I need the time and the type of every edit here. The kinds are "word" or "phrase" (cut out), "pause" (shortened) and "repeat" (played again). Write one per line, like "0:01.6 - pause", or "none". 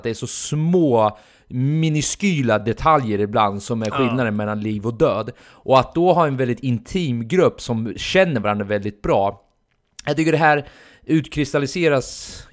none

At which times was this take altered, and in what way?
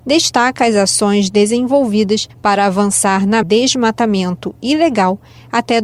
0:02.3 - pause
0:03.4 - phrase

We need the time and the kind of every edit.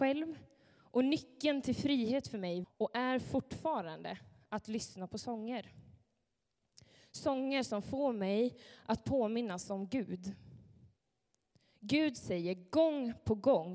0:02.6 - word

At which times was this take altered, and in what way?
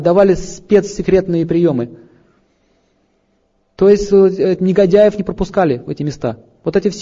none

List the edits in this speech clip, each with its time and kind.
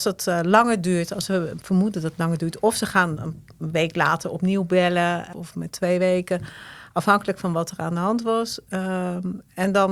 0:03.2 - word
0:05.3 - word

